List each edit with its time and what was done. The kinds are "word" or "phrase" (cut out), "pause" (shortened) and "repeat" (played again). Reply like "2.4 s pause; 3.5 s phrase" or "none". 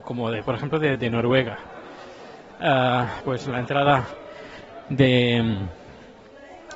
1.0 s word; 3.2 s word